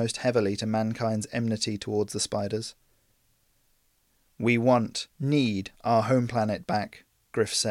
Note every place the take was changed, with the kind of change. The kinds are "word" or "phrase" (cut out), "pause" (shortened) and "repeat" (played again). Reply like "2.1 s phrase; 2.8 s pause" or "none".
5.1 s pause